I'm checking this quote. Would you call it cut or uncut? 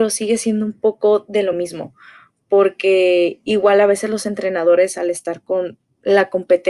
uncut